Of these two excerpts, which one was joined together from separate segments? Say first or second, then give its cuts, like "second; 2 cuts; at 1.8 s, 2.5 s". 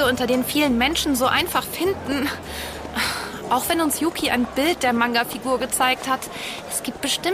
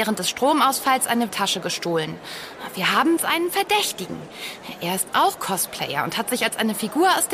second; 2 cuts; at 1.3 s, 3.2 s